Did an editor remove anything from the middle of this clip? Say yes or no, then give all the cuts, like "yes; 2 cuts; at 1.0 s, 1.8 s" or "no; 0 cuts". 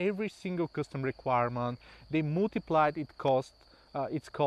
no; 0 cuts